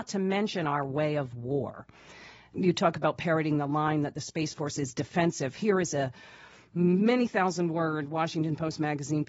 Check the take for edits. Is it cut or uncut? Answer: uncut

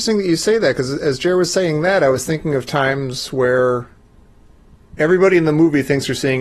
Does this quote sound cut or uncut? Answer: uncut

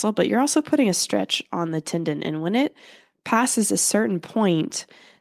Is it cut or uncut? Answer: uncut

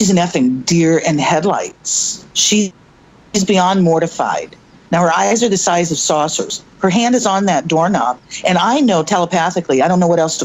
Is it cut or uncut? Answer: cut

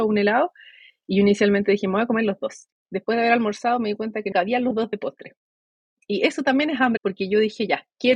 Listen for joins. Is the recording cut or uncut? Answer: cut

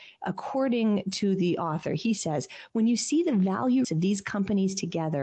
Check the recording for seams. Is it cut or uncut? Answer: cut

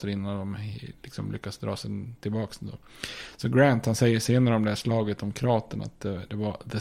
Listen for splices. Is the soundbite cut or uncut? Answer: uncut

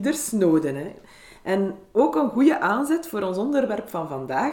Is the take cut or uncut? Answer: uncut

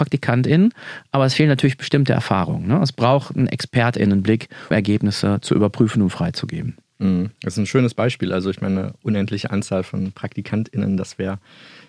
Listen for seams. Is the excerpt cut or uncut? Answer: cut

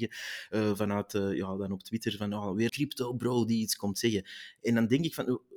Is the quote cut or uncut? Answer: cut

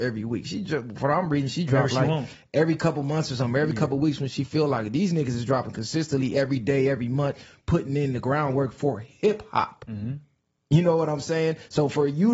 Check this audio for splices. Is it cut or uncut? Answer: uncut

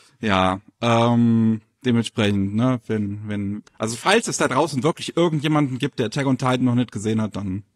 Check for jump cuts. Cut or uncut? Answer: cut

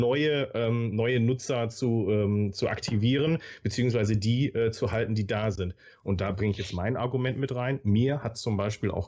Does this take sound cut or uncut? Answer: uncut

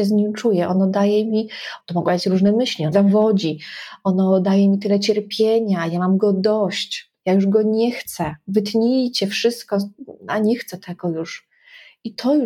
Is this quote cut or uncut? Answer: cut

